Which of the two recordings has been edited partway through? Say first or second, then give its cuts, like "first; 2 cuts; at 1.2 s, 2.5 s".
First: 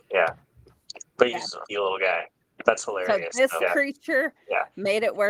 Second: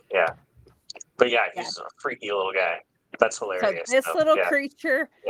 first; 3 cuts; at 1.3 s, 1.7 s, 3.6 s